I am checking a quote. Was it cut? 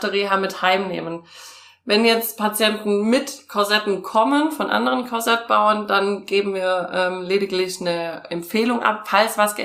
no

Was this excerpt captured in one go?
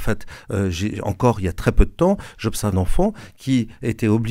no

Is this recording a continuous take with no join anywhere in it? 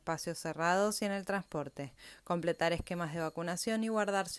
yes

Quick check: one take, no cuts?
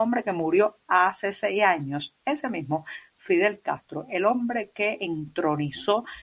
yes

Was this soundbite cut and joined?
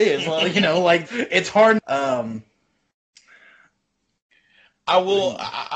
yes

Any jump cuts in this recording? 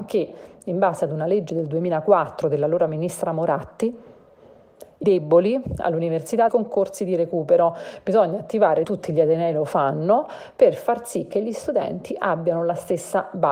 yes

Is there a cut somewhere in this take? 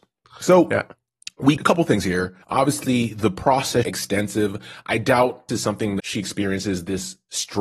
yes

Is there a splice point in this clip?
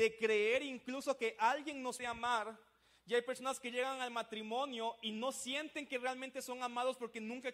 yes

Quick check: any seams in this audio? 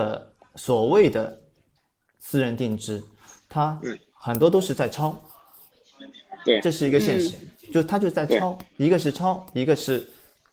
no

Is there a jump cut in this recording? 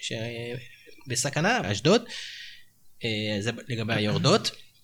yes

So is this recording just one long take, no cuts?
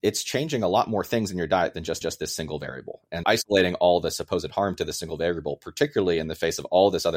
no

